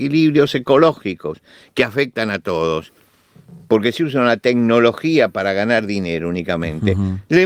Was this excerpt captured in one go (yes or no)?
yes